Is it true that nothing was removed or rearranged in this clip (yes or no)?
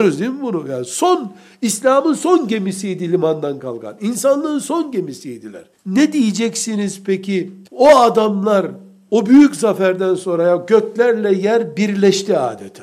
no